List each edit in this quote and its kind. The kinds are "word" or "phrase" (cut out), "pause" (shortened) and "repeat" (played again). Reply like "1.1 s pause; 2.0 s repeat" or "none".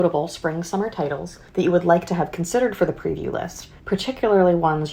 1.5 s pause; 3.8 s pause